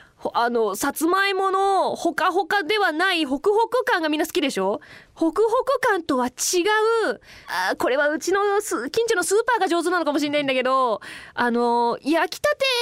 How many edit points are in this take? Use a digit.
2